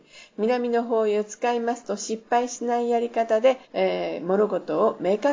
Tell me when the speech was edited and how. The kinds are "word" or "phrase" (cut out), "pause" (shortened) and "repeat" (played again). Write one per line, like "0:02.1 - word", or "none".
0:03.6 - pause